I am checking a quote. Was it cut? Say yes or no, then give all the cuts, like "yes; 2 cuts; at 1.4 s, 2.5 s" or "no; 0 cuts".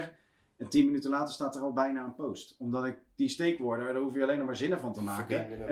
no; 0 cuts